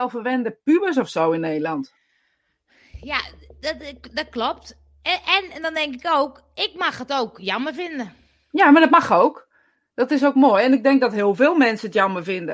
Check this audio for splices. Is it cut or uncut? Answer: uncut